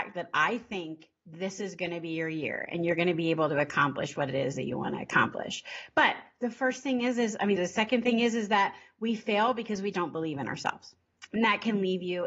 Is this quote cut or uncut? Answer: cut